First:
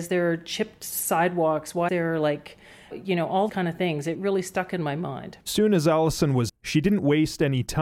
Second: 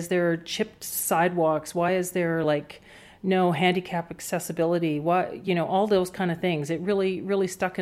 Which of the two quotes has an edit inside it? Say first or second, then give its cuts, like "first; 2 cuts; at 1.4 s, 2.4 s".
first; 5 cuts; at 1.9 s, 2.9 s, 3.5 s, 4.1 s, 6.5 s